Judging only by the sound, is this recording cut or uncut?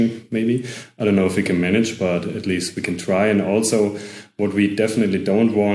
uncut